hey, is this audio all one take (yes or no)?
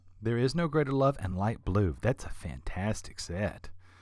yes